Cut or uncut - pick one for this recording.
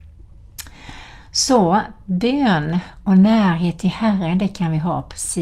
uncut